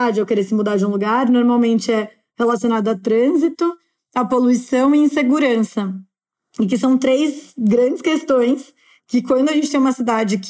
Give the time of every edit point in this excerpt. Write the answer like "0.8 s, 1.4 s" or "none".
none

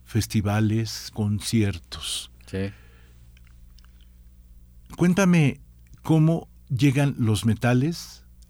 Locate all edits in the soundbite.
1.1 s, 6.6 s

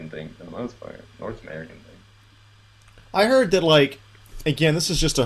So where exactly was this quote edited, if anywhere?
3.0 s

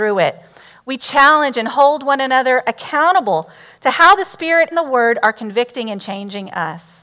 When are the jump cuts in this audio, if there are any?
4.7 s

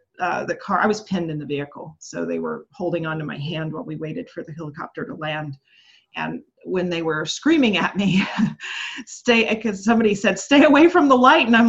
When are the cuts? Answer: none

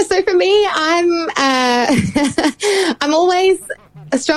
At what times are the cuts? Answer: none

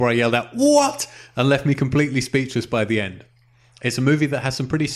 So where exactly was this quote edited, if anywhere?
none

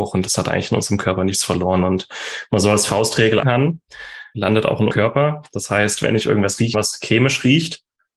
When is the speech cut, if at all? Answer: 3.4 s, 4.3 s, 4.9 s, 6.7 s

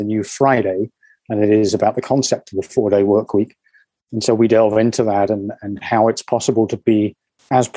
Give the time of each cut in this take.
none

